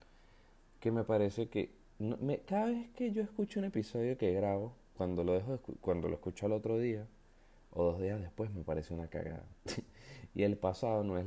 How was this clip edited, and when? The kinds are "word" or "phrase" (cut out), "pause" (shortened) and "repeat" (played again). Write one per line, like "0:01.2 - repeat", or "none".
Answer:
0:05.0 - word